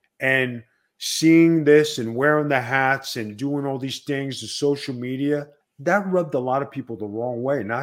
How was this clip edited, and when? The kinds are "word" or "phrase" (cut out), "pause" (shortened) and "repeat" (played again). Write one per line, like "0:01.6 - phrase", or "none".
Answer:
0:05.6 - pause